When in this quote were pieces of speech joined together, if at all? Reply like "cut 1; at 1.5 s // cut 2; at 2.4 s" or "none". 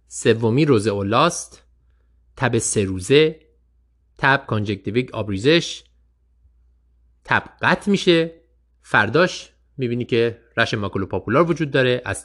none